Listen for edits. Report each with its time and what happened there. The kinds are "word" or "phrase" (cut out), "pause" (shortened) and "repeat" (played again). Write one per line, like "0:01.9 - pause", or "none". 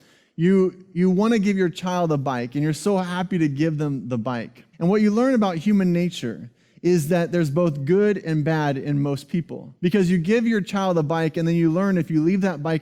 0:04.7 - pause
0:09.8 - pause

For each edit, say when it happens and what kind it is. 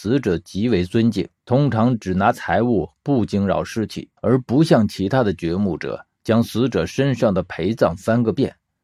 0:01.4 - pause
0:04.2 - pause

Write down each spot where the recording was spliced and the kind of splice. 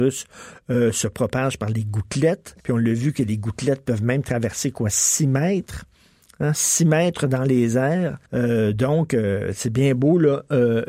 0:02.6 - pause
0:08.3 - pause

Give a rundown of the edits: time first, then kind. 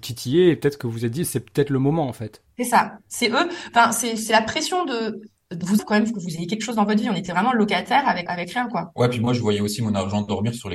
0:05.8 - phrase
0:08.3 - word

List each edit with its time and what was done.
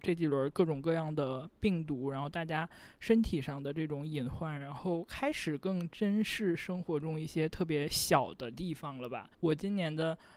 0:09.3 - pause

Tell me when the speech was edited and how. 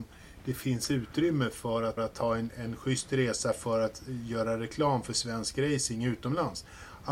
0:02.0 - repeat
0:02.5 - word

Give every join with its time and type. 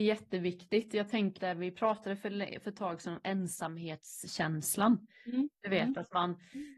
0:01.4 - word

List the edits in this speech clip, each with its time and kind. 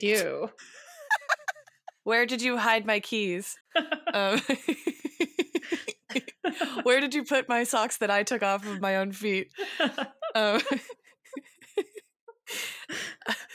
0:03.6 - pause

